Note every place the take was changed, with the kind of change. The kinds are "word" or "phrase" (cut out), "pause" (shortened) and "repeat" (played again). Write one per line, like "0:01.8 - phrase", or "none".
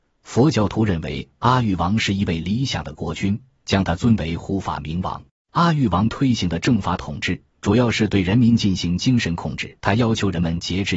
0:05.3 - pause
0:07.5 - pause
0:09.8 - pause